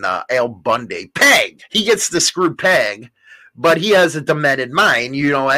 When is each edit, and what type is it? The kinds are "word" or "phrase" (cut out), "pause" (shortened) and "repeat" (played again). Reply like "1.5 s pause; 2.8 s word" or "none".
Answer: 1.7 s pause